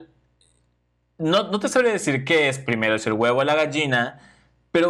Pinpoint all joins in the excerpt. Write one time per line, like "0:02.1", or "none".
none